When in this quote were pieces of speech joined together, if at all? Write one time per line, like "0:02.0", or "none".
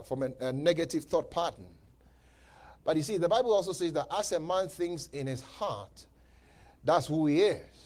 none